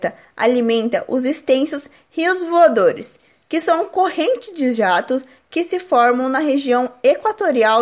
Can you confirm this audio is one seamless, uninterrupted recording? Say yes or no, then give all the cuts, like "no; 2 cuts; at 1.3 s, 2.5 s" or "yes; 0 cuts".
yes; 0 cuts